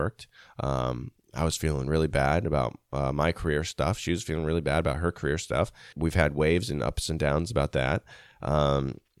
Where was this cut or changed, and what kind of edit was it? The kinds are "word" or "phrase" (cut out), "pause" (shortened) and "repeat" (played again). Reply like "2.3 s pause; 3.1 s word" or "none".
5.9 s word